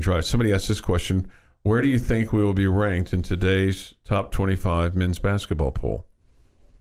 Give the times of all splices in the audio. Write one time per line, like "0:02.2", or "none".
none

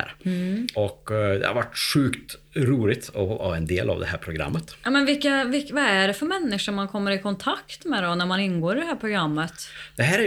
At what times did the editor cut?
none

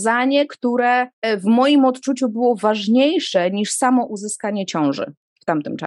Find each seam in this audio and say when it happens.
0:01.1

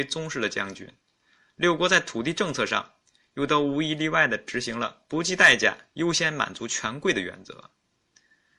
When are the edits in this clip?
none

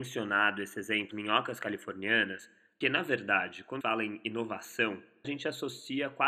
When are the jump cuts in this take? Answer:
0:01.1
0:02.8
0:03.8
0:05.2

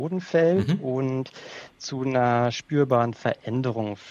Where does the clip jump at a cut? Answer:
none

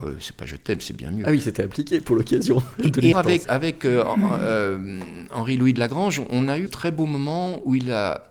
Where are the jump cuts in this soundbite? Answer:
0:02.1
0:03.1
0:03.4
0:06.7

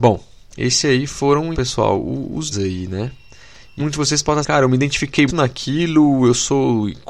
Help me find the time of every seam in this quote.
0:01.5
0:02.5
0:03.8
0:04.4
0:05.3

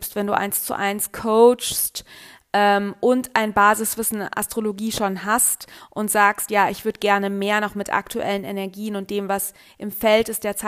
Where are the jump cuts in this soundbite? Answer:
none

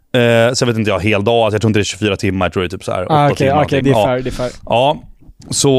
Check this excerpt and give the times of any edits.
0:03.8

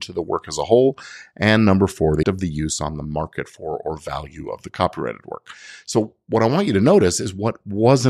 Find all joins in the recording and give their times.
0:02.2

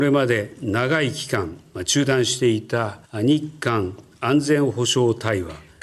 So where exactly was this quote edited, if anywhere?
0:03.0

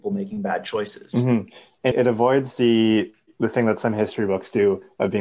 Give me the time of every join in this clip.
0:01.9

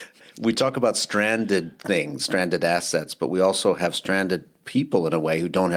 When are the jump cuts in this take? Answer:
none

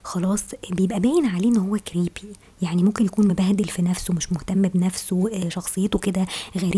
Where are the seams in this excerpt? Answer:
none

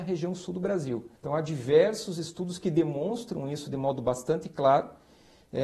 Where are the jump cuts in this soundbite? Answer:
0:01.2

